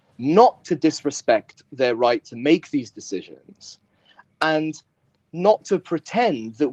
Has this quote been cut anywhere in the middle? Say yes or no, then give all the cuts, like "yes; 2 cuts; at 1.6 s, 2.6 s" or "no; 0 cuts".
no; 0 cuts